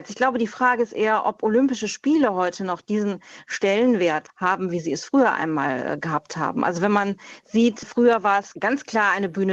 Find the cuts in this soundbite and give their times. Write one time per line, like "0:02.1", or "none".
0:04.3